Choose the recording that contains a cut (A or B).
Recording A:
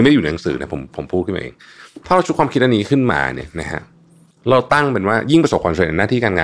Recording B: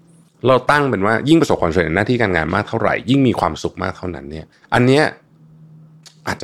B